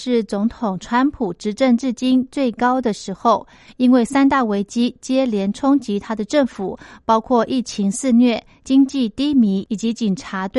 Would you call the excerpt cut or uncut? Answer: uncut